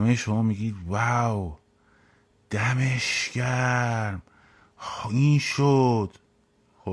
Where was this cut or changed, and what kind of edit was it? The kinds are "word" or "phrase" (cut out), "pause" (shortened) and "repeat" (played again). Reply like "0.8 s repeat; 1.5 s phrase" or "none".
none